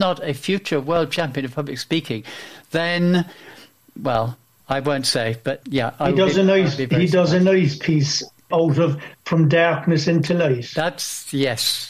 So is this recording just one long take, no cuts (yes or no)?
yes